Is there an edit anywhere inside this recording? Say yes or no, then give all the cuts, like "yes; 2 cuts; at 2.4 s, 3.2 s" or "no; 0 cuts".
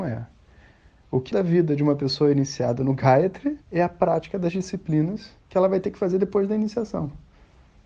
yes; 3 cuts; at 1.3 s, 3.6 s, 5.4 s